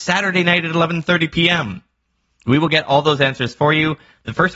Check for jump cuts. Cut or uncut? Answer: uncut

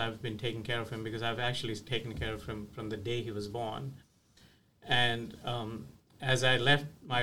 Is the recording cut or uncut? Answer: uncut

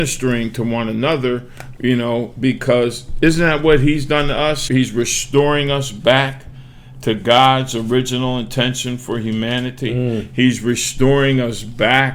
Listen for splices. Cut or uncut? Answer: cut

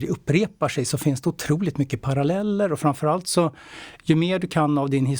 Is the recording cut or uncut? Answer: uncut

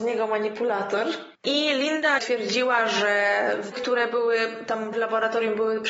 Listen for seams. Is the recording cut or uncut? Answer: cut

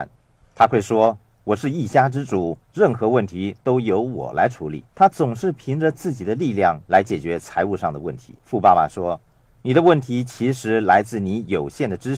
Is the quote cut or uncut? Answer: cut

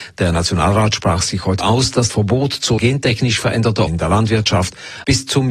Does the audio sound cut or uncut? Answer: cut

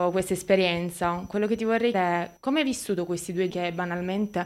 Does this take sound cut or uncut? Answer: cut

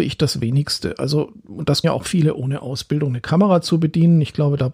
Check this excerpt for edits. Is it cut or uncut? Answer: cut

